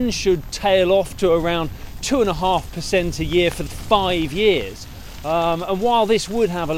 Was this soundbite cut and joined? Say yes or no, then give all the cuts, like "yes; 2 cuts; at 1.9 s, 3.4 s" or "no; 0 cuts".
yes; 1 cut; at 3.7 s